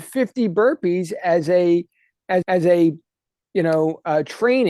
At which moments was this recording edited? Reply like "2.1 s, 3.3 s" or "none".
2.4 s